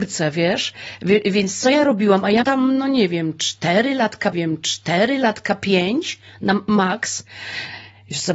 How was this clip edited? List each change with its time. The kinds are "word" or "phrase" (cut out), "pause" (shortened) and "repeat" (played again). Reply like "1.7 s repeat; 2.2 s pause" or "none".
2.4 s word; 4.3 s repeat